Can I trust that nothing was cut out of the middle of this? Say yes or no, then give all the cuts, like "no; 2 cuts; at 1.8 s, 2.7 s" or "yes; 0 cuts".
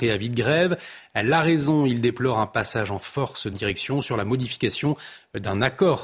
no; 1 cut; at 3.5 s